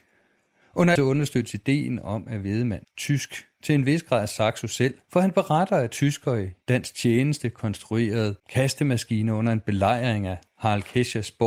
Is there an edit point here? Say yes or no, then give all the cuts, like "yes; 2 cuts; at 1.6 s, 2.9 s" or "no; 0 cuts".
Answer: yes; 4 cuts; at 1.0 s, 2.8 s, 5.0 s, 8.4 s